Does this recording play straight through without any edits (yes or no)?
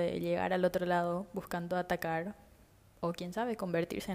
yes